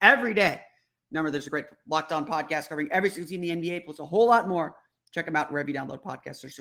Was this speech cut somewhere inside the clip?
no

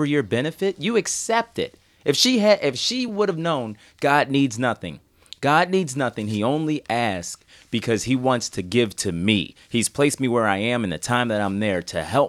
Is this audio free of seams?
yes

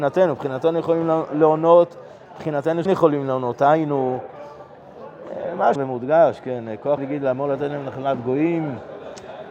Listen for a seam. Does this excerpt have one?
yes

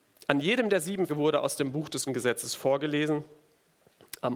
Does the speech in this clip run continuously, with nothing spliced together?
no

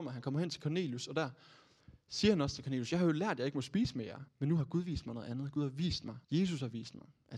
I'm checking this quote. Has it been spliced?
yes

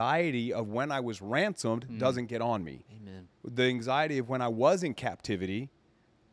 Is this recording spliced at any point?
yes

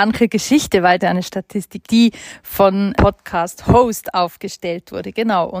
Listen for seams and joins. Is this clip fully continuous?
no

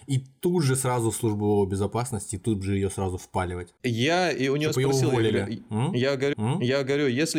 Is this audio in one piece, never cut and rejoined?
no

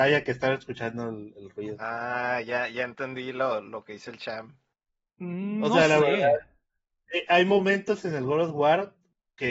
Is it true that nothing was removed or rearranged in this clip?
yes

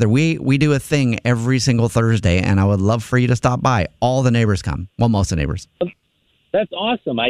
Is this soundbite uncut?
yes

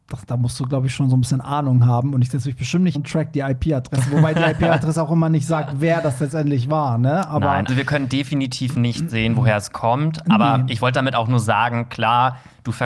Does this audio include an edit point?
yes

